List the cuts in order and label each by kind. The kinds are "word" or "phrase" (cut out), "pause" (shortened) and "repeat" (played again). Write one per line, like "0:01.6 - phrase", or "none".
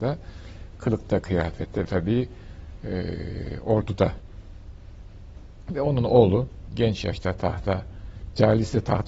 0:01.8 - phrase